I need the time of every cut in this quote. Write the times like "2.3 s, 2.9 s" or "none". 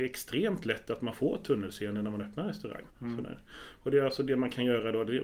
2.9 s